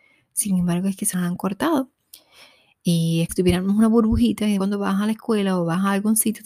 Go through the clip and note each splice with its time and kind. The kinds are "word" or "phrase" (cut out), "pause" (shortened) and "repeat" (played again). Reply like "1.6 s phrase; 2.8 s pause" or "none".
1.1 s word; 3.3 s word; 4.6 s word